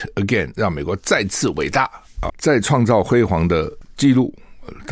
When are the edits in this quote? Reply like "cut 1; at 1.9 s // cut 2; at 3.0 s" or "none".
cut 1; at 2.3 s